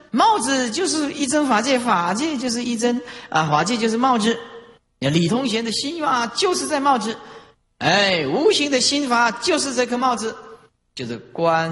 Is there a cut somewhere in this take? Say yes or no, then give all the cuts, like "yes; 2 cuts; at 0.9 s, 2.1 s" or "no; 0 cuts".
no; 0 cuts